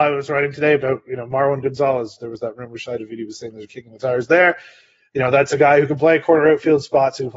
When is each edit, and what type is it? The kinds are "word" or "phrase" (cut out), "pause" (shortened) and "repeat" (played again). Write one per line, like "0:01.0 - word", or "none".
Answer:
none